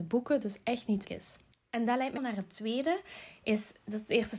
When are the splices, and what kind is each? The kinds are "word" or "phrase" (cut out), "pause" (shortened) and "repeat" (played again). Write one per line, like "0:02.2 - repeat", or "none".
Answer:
0:01.0 - word
0:02.2 - word